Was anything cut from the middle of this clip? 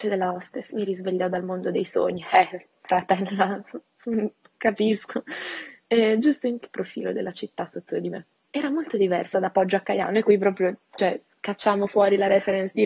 yes; 3 cuts; at 6.6 s, 8.5 s, 11.3 s

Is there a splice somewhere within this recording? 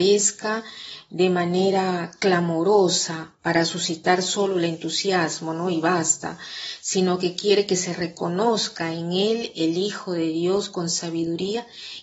no; 0 cuts

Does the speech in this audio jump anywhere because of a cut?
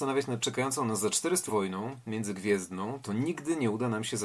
yes; 1 cut; at 1.5 s

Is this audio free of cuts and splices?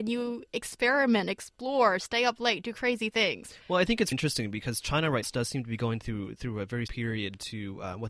no; 3 cuts; at 4.1 s, 5.2 s, 6.9 s

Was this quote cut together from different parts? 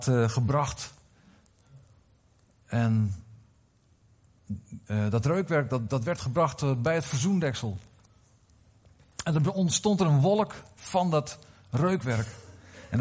no; 0 cuts

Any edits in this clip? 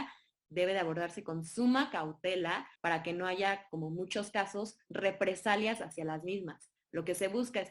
yes; 1 cut; at 2.8 s

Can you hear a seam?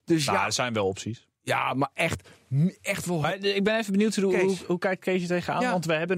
no; 0 cuts

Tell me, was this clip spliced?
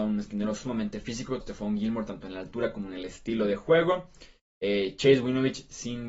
yes; 1 cut; at 1.4 s

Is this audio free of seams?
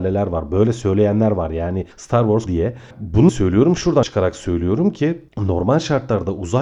no; 5 cuts; at 1.9 s, 2.5 s, 3.3 s, 4.0 s, 5.3 s

